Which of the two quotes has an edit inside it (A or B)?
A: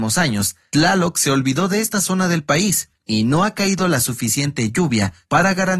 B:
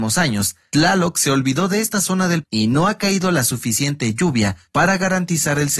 B